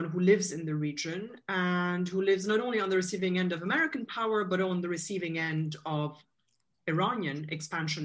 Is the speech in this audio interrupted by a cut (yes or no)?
no